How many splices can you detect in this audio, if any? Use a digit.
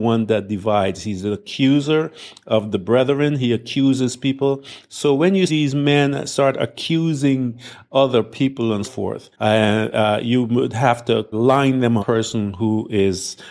5